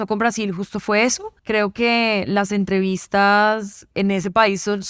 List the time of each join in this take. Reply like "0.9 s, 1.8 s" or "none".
1.4 s